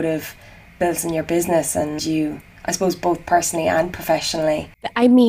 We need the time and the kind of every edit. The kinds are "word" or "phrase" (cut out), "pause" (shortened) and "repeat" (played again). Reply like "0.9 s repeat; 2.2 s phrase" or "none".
2.0 s phrase